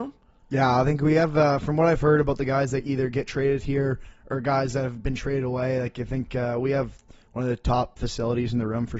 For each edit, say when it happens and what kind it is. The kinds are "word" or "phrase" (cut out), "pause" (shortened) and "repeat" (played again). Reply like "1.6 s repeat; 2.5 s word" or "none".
none